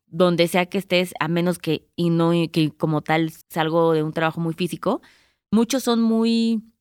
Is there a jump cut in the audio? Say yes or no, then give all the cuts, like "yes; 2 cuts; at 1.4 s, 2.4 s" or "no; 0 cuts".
yes; 1 cut; at 3.4 s